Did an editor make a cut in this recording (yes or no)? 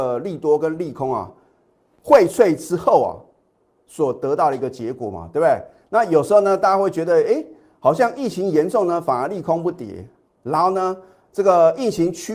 no